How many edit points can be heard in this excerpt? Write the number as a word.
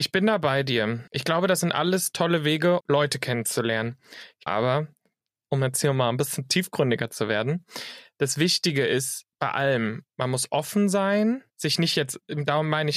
five